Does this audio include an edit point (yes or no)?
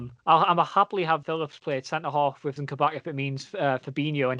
yes